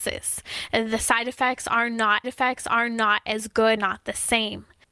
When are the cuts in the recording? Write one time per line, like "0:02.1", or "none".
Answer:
0:02.2
0:03.8